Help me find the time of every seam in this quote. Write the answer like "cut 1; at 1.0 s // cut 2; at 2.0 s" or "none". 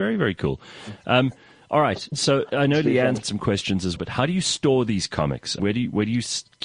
cut 1; at 3.2 s // cut 2; at 4.0 s // cut 3; at 5.6 s

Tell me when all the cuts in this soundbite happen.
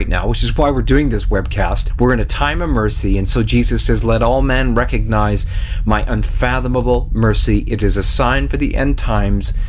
none

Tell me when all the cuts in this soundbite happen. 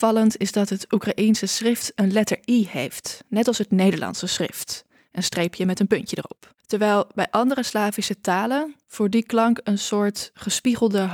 none

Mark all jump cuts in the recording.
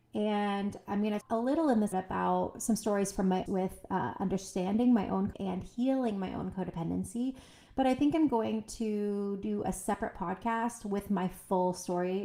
cut 1; at 1.2 s // cut 2; at 1.9 s // cut 3; at 3.5 s // cut 4; at 5.3 s

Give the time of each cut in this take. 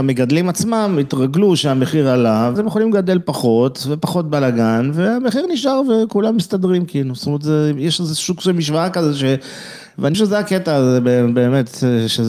cut 1; at 2.6 s // cut 2; at 10.1 s

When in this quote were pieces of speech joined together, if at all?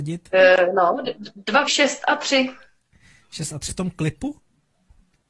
cut 1; at 1.7 s // cut 2; at 3.7 s

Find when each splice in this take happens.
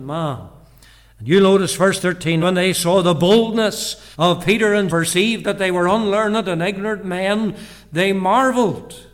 cut 1; at 2.4 s // cut 2; at 4.1 s // cut 3; at 4.9 s

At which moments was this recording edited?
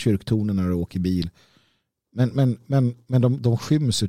none

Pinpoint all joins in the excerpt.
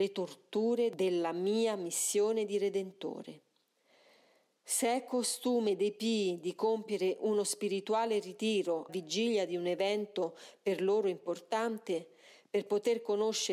cut 1; at 8.9 s

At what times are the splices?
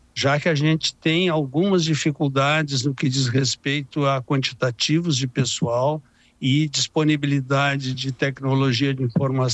none

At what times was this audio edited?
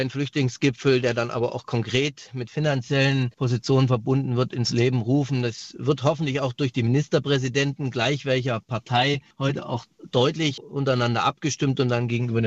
cut 1; at 3.3 s // cut 2; at 9.3 s

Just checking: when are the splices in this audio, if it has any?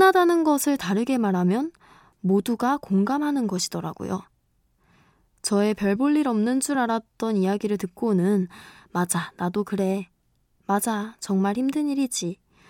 none

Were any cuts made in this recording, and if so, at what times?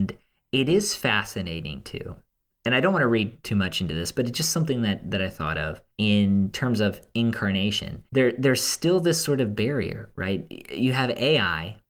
cut 1; at 5.9 s // cut 2; at 8.1 s

